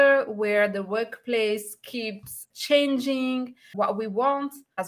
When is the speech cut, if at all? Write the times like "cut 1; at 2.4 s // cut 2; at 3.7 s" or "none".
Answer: cut 1; at 2.5 s

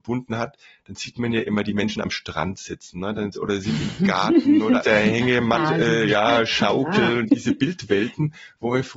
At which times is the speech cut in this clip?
cut 1; at 4.8 s // cut 2; at 7.3 s

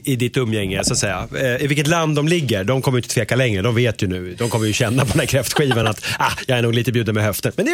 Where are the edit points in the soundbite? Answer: none

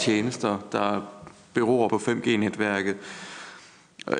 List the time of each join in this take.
cut 1; at 1.9 s

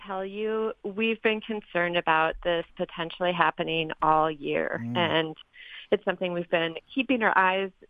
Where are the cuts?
cut 1; at 6.0 s

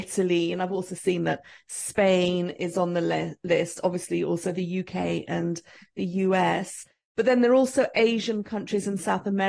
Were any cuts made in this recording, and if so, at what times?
none

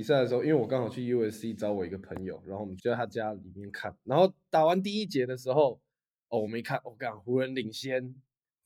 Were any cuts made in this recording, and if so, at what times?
none

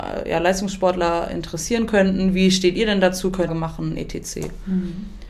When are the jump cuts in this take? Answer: cut 1; at 3.5 s

